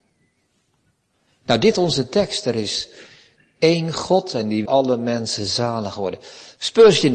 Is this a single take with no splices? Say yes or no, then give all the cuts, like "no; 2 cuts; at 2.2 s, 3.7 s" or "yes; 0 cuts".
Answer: no; 2 cuts; at 1.7 s, 4.7 s